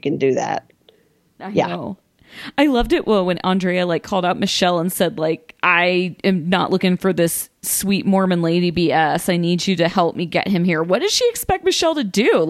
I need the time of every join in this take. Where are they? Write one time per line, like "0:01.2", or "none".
none